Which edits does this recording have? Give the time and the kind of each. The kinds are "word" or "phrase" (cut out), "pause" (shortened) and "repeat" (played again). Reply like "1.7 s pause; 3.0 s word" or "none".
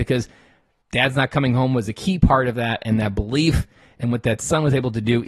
none